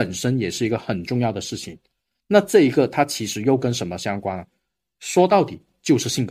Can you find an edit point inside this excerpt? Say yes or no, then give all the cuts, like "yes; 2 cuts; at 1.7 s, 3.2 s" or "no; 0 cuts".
no; 0 cuts